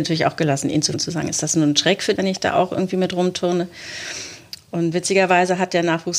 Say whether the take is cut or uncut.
cut